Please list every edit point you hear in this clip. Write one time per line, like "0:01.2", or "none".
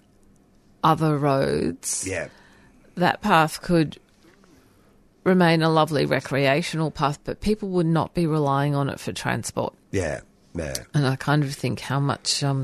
none